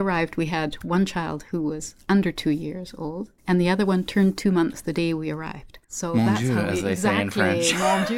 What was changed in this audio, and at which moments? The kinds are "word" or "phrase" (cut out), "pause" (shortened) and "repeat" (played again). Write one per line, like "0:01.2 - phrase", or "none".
0:03.4 - pause
0:05.8 - pause